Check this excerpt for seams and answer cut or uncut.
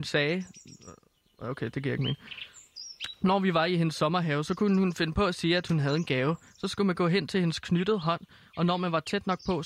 uncut